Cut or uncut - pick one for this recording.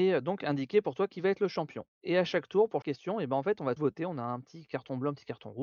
cut